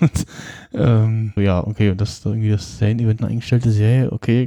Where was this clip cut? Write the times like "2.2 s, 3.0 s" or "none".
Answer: 1.4 s, 3.2 s